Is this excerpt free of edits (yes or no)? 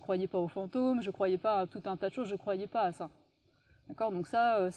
yes